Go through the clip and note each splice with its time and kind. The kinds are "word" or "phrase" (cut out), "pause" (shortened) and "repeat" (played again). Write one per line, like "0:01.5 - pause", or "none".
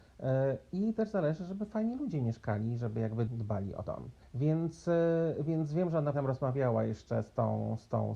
0:03.3 - word
0:03.9 - word
0:04.2 - pause
0:06.1 - word